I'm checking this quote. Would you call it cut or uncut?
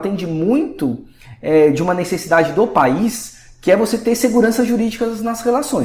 uncut